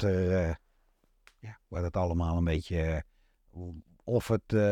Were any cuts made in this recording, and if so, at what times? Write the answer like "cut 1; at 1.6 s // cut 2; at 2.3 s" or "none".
none

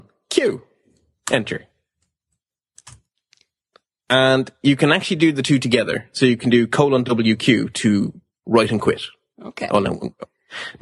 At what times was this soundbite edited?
none

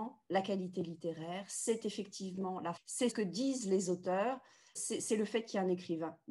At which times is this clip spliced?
cut 1; at 2.8 s // cut 2; at 3.1 s // cut 3; at 4.8 s

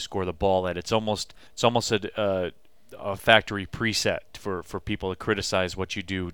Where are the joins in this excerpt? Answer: cut 1; at 1.5 s

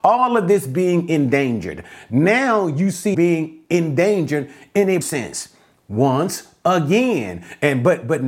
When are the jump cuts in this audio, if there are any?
cut 1; at 3.1 s // cut 2; at 5.0 s

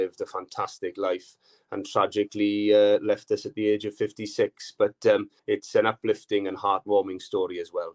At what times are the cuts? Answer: cut 1; at 5.4 s

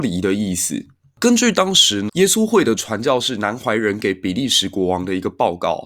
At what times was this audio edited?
cut 1; at 2.1 s

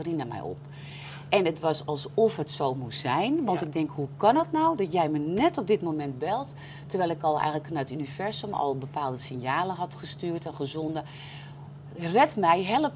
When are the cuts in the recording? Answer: none

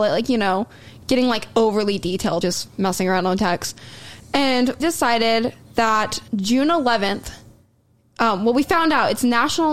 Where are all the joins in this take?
cut 1; at 2.4 s // cut 2; at 4.8 s // cut 3; at 6.3 s

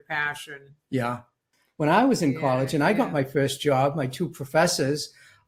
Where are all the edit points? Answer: none

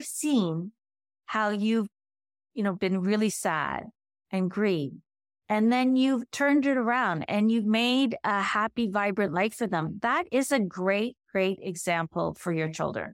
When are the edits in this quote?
none

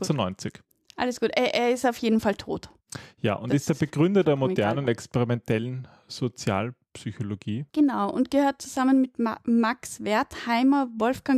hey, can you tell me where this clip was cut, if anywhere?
cut 1; at 7.7 s

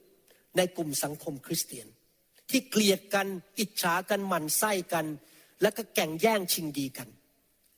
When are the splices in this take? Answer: none

